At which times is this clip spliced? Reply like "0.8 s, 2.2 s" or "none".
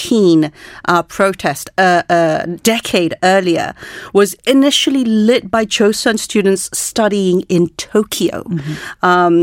none